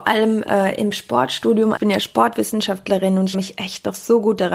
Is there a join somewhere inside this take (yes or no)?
yes